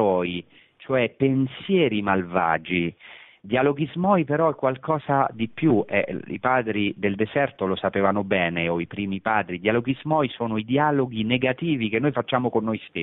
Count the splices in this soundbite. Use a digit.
0